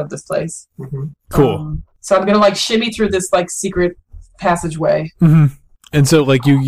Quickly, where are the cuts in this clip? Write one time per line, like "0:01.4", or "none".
none